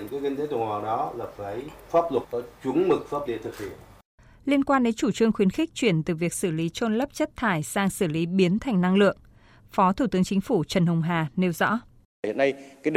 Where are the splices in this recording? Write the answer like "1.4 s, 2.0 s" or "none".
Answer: 2.2 s, 3.3 s